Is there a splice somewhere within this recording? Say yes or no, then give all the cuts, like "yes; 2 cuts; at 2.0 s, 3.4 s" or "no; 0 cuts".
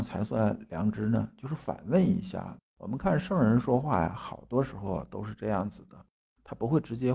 yes; 1 cut; at 2.7 s